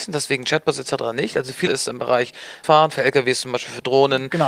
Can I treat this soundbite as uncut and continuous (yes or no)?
no